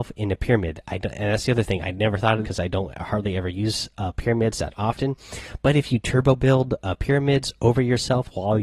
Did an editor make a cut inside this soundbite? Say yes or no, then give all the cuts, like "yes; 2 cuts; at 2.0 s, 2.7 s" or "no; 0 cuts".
yes; 1 cut; at 2.4 s